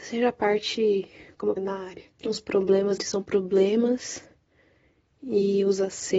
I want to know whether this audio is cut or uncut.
cut